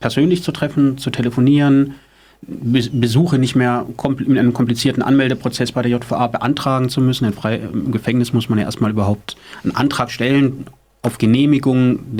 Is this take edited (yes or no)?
no